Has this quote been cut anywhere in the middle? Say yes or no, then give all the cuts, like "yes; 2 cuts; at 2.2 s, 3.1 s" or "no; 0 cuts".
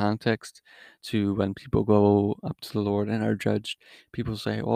no; 0 cuts